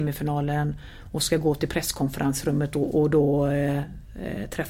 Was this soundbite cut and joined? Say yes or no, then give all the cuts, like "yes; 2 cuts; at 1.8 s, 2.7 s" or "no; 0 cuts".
no; 0 cuts